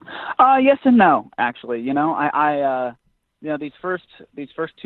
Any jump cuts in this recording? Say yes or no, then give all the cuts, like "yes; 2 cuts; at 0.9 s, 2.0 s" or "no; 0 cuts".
no; 0 cuts